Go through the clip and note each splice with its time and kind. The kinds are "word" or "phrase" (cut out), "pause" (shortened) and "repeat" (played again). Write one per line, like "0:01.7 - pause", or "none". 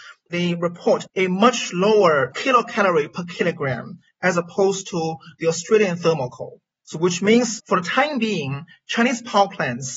0:01.1 - pause
0:06.7 - pause